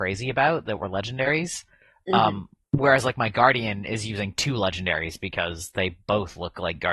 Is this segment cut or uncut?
uncut